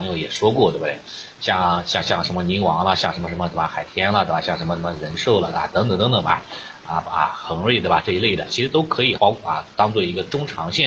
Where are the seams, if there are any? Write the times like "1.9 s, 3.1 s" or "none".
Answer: 9.2 s